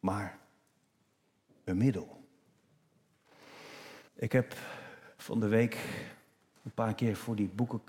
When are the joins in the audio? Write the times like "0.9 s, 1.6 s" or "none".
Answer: 4.1 s